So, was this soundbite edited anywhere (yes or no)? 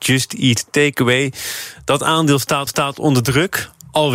yes